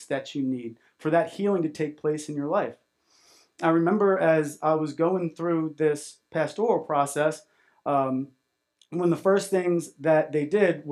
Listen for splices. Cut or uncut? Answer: uncut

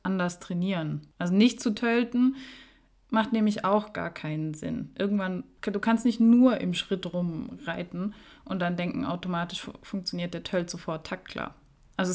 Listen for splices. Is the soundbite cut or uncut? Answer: uncut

